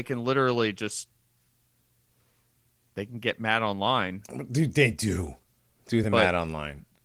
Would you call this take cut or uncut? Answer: uncut